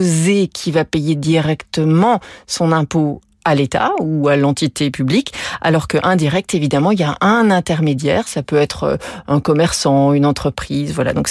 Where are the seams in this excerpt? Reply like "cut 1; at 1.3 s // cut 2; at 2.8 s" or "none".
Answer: none